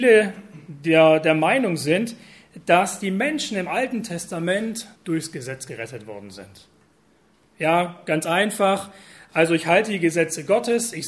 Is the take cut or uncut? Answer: cut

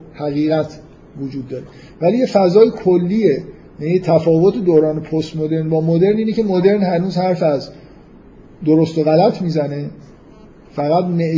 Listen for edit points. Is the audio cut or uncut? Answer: uncut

